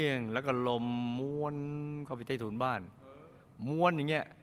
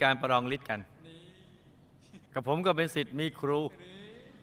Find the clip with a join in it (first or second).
second